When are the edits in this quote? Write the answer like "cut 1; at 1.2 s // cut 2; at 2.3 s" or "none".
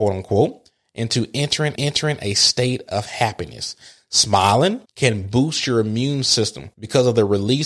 cut 1; at 1.7 s // cut 2; at 4.8 s // cut 3; at 6.7 s